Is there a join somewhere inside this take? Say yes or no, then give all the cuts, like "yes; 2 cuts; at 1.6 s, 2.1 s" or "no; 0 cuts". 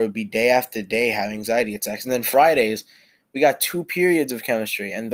no; 0 cuts